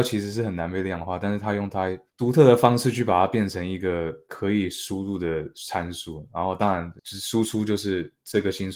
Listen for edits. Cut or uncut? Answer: cut